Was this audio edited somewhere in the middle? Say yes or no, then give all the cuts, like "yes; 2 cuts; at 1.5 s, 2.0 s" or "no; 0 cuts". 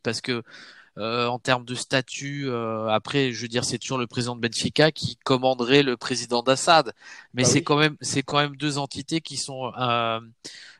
no; 0 cuts